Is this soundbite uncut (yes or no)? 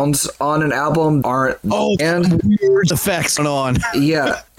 no